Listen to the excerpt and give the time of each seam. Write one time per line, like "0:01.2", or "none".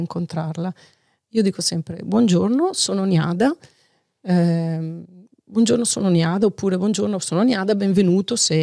none